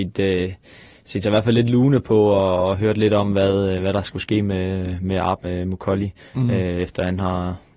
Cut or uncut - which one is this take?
cut